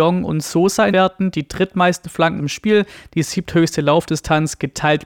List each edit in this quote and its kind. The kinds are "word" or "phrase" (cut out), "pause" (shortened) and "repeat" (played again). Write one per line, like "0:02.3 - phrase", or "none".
0:00.9 - word
0:02.4 - word